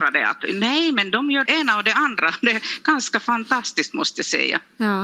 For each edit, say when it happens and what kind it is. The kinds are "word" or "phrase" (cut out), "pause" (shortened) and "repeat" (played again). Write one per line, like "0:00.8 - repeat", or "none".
0:01.4 - word

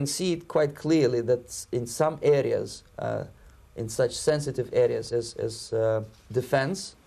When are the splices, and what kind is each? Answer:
none

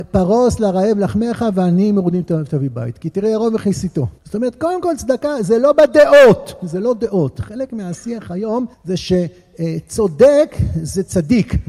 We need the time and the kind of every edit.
0:04.2 - pause
0:08.7 - pause

